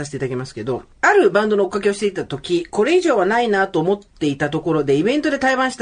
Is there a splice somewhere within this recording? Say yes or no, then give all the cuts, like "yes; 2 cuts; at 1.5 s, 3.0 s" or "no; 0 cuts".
yes; 1 cut; at 0.9 s